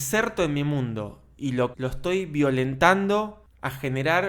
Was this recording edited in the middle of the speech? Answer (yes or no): yes